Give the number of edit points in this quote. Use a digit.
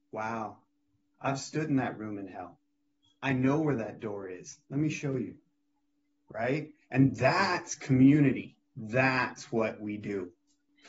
1